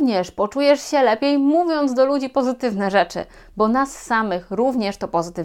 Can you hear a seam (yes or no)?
no